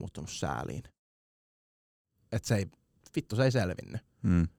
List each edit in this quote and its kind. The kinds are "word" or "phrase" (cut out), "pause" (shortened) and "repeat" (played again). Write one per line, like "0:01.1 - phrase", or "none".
none